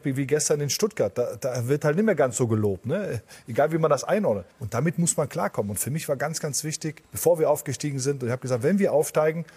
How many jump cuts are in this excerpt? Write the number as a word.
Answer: two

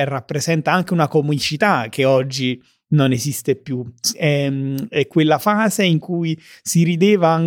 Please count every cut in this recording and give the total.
zero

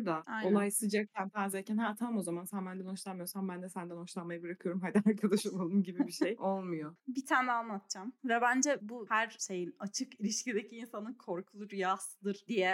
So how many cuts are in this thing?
one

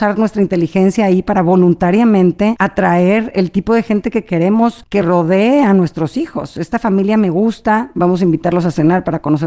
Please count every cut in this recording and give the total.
zero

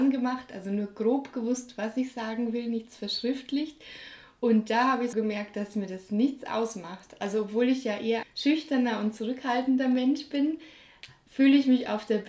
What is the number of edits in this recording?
two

